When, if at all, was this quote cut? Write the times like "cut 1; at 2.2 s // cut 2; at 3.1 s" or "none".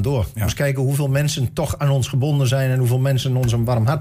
none